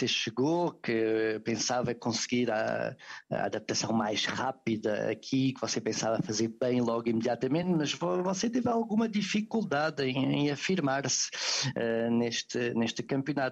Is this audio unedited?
yes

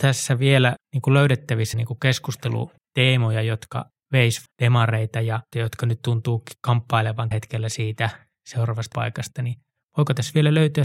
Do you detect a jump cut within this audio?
yes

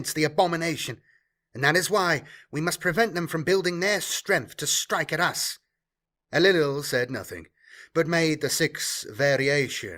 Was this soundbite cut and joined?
no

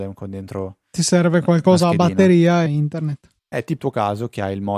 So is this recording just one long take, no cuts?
no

